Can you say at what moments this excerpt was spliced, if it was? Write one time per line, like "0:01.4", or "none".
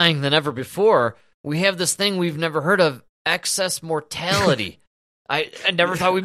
none